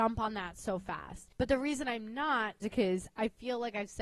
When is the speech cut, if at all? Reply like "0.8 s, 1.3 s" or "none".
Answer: 1.3 s, 2.6 s